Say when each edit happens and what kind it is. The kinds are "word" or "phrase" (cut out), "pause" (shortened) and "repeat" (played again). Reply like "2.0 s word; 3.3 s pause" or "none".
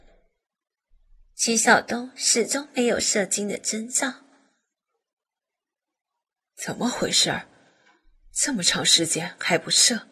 none